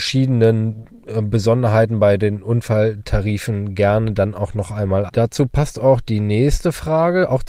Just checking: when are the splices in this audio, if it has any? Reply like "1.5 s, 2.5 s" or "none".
5.1 s